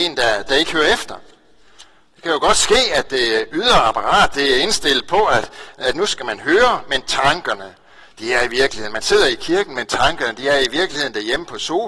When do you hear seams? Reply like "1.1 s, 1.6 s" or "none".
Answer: none

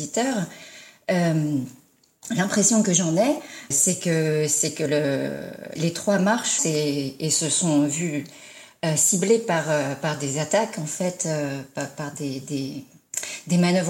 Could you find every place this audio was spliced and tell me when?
3.7 s, 5.8 s, 6.6 s

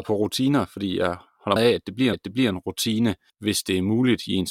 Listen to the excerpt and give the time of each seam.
1.6 s, 2.1 s, 3.3 s

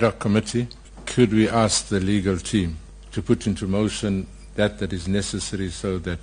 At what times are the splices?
none

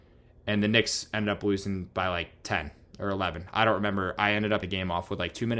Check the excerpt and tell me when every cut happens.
4.6 s

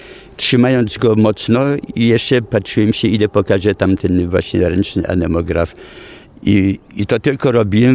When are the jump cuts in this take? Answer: none

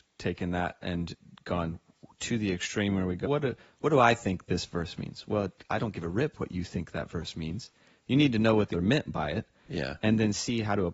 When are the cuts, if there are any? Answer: 3.3 s, 8.7 s

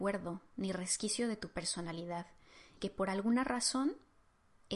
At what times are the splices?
2.8 s

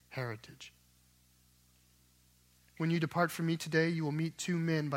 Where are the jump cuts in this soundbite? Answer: none

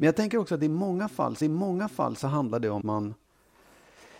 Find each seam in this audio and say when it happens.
1.4 s, 2.8 s

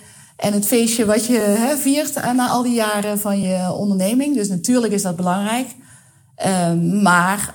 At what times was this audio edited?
none

